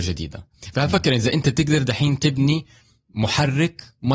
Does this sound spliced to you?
no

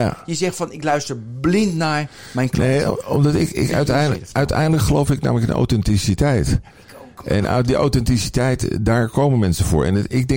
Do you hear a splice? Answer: no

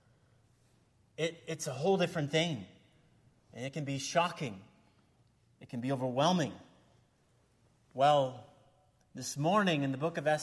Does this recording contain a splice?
no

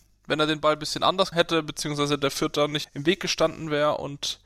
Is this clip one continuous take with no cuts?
no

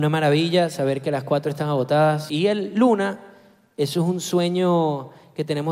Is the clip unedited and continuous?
yes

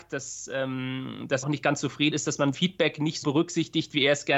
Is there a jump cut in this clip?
yes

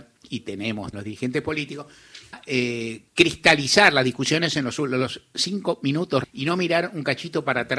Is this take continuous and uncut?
no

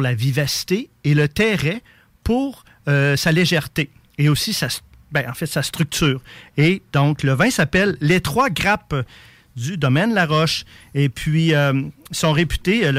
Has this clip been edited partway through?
no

